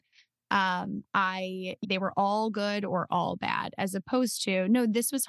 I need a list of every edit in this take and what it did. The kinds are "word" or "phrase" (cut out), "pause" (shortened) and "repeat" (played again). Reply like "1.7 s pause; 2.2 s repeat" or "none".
1.8 s phrase